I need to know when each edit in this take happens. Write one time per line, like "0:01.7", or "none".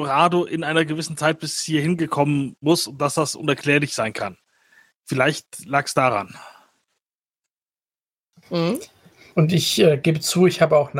0:02.6

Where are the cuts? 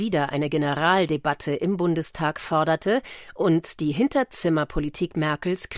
none

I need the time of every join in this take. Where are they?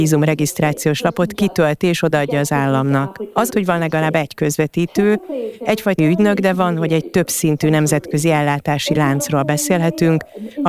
0:03.5
0:06.0

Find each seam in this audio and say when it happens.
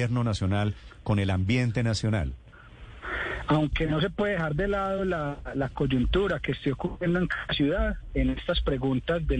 none

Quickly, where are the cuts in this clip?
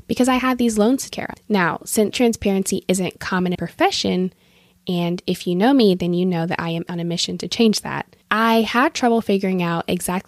0:01.1
0:02.1
0:03.5
0:06.9
0:08.2

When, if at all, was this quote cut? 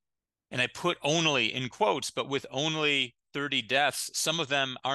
none

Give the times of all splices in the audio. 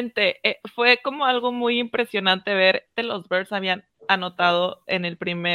0:03.0

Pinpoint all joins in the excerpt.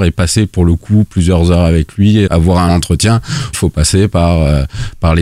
0:02.3
0:02.7
0:03.5

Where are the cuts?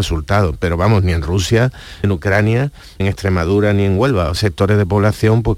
0:02.0
0:03.0
0:04.4

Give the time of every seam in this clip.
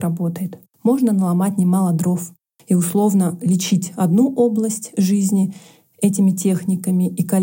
none

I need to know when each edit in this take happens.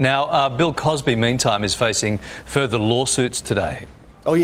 none

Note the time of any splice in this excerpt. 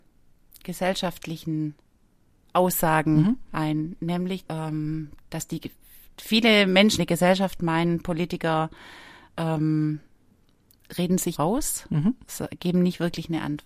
0:04.5
0:07.0
0:11.4

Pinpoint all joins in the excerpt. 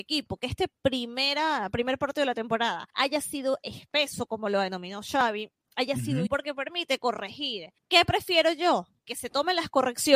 0:02.9
0:06.3
0:07.8

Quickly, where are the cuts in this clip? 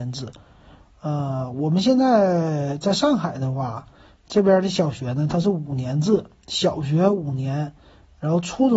none

